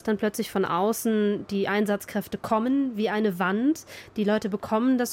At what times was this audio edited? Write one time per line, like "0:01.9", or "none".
none

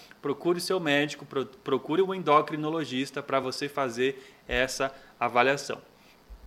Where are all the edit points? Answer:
none

